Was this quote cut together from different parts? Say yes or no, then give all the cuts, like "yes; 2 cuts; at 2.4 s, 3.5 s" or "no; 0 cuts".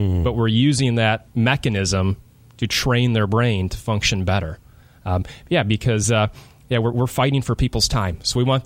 no; 0 cuts